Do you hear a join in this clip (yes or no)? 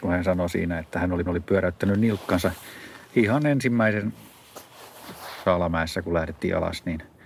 yes